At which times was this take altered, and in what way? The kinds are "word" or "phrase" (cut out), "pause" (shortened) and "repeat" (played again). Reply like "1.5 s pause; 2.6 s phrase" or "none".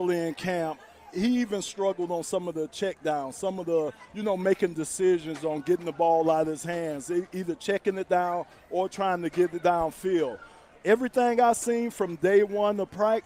none